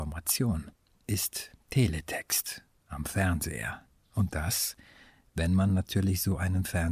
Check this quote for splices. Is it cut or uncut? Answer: uncut